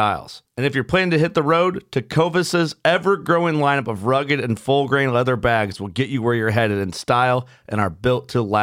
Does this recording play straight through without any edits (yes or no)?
yes